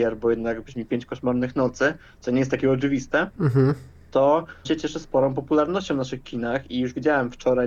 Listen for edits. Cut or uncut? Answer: cut